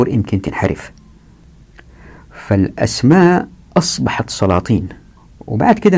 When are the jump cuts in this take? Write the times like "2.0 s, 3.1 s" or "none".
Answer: none